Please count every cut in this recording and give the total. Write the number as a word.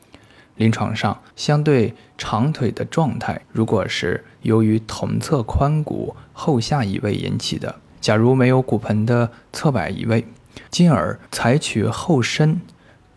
five